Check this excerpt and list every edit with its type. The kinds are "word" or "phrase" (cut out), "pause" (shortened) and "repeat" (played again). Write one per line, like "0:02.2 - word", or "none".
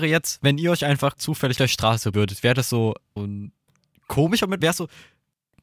0:01.2 - word
0:01.6 - word
0:02.1 - word
0:03.2 - word
0:04.6 - word